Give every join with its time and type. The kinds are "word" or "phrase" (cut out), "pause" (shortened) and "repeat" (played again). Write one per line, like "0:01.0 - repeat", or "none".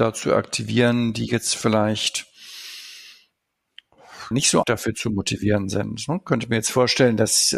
0:04.3 - word
0:04.6 - word